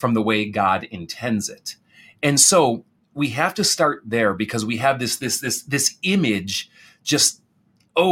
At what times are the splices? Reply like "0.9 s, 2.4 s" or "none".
none